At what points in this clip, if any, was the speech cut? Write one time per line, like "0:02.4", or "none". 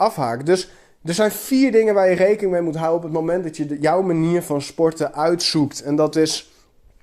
none